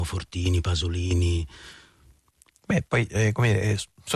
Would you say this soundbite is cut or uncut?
uncut